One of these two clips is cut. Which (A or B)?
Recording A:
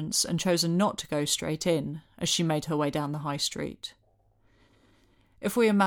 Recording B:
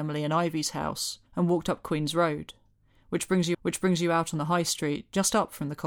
B